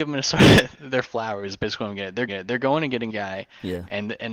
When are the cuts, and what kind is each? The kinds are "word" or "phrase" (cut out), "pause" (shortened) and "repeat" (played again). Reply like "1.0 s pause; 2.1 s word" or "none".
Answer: 2.3 s repeat; 3.1 s word